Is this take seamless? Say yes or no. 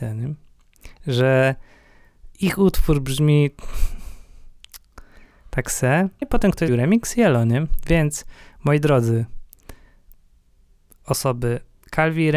no